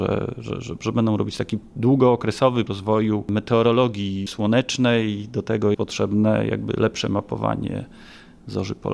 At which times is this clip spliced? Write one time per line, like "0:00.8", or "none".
0:02.7
0:05.7

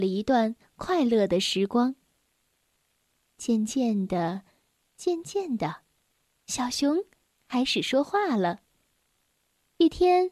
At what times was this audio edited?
none

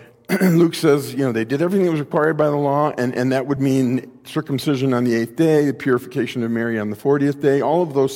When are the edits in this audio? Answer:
none

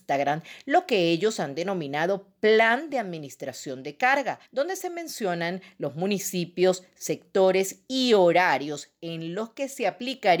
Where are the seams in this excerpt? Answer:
0:04.5

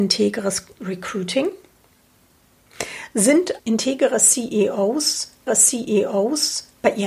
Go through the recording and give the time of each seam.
0:03.6
0:05.5

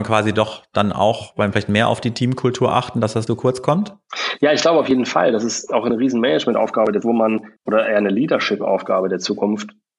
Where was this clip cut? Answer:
0:01.5
0:03.3
0:07.0
0:07.6

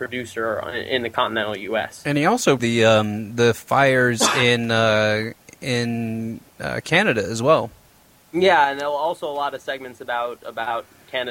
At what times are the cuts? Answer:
0:02.6

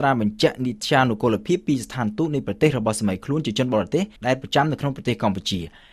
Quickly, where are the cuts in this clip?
0:04.2

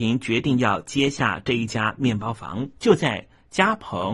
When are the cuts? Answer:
0:02.7

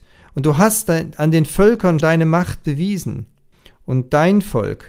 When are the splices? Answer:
0:02.0

